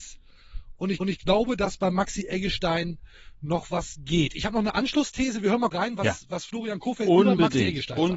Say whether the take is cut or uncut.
cut